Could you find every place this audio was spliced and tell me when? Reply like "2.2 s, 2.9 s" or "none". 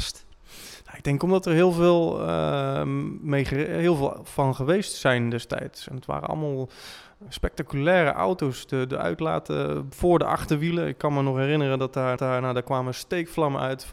7.3 s, 12.2 s